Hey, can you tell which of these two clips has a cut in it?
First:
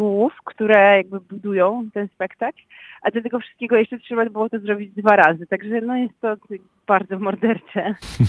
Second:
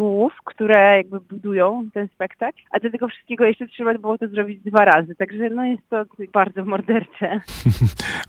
second; 2 cuts; at 2.7 s, 6.3 s

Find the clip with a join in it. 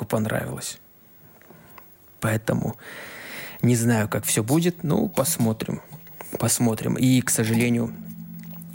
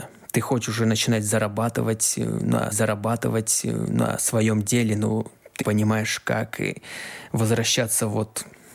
second; 2 cuts; at 2.7 s, 5.6 s

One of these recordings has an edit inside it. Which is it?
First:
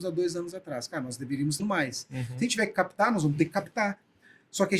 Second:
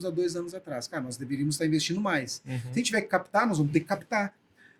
first; 1 cut; at 1.6 s

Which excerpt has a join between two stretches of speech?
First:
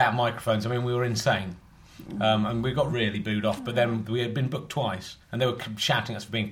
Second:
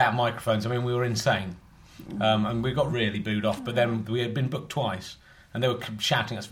first; 1 cut; at 5.2 s

